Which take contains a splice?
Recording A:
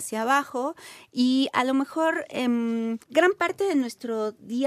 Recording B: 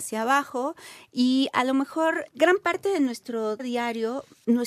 B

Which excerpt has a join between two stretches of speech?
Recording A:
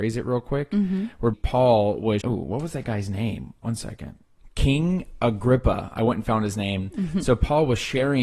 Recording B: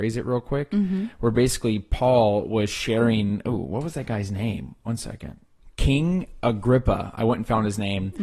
A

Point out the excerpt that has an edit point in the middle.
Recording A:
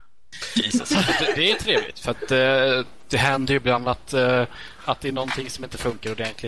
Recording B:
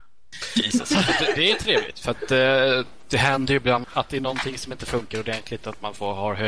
B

